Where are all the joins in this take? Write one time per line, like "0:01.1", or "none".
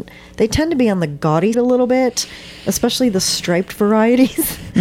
0:01.5